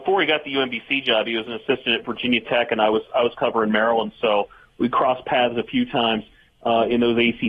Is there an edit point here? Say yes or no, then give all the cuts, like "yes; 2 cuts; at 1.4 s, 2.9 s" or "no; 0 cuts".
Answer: no; 0 cuts